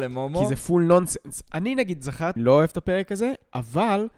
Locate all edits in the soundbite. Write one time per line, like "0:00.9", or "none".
0:02.4